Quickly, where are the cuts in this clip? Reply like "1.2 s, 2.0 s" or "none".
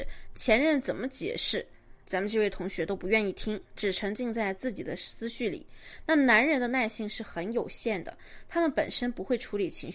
2.0 s